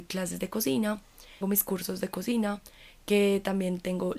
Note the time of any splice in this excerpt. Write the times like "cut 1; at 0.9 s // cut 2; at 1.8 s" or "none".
cut 1; at 1.4 s